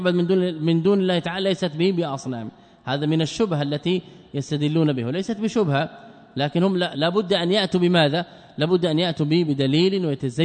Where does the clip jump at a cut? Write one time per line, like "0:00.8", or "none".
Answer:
none